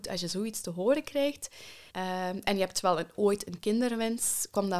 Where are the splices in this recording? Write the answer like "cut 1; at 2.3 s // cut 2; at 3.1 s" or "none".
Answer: cut 1; at 1.9 s